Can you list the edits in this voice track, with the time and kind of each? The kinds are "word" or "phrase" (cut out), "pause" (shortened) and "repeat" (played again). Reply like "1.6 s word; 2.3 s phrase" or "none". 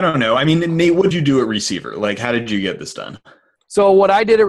1.1 s word

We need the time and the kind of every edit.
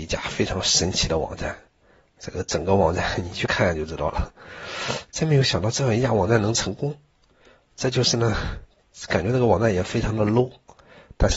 none

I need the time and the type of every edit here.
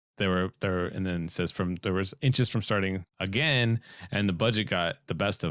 3.1 s pause

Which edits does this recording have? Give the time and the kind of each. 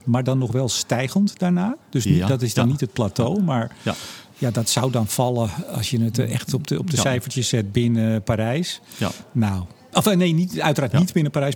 1.8 s pause

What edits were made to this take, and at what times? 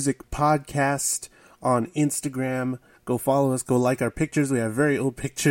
none

